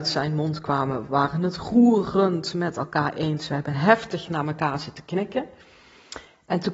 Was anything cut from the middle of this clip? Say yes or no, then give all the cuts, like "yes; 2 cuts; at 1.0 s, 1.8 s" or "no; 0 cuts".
no; 0 cuts